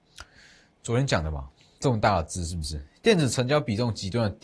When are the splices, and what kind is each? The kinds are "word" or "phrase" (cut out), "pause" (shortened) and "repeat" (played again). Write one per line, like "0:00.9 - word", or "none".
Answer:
0:01.6 - pause